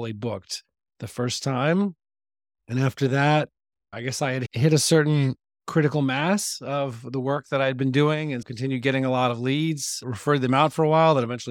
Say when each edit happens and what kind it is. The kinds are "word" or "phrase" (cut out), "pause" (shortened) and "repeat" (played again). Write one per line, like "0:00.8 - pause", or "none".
0:08.4 - word

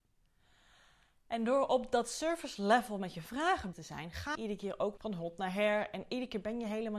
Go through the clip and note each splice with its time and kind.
0:03.7 - word
0:04.3 - word
0:05.0 - word

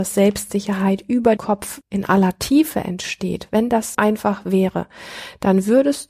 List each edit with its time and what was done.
0:01.4 - word
0:01.8 - word
0:03.9 - word

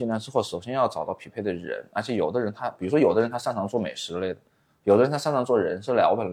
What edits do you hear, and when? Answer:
none

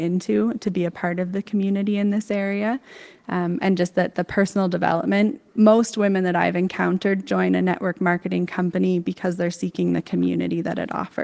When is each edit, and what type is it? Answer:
0:05.5 - pause

